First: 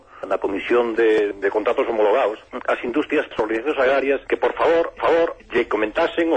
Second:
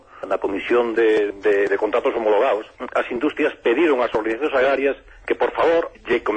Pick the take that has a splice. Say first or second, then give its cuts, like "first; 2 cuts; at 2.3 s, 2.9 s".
first; 4 cuts; at 1.4 s, 3.3 s, 4.2 s, 5.0 s